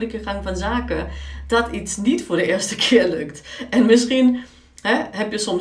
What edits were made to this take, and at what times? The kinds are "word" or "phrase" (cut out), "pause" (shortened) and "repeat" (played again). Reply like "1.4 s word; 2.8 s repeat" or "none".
none